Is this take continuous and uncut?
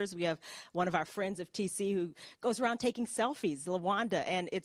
yes; 0 cuts

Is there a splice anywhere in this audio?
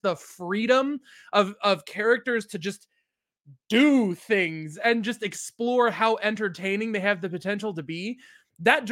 no; 0 cuts

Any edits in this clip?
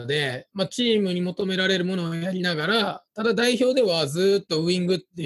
no; 0 cuts

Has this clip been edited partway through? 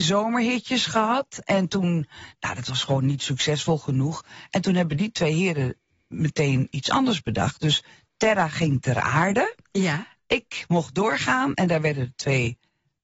no; 0 cuts

